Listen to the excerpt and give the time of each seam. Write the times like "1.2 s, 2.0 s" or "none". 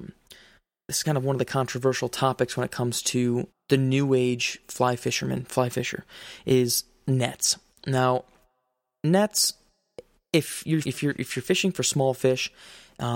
1.0 s, 3.5 s, 10.8 s